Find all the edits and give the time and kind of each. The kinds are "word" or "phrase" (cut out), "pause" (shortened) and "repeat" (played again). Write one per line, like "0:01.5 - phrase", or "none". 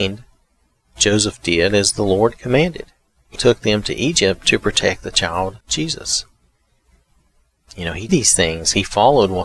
0:03.4 - word
0:05.6 - pause
0:08.1 - word

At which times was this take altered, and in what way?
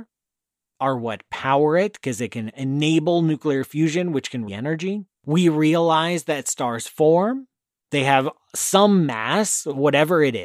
0:04.5 - phrase
0:05.1 - pause

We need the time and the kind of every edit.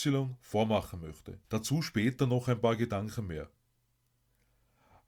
0:01.4 - pause

